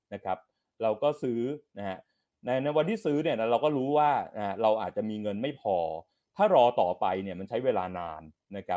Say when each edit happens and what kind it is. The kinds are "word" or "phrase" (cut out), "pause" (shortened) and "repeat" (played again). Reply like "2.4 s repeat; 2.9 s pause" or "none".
none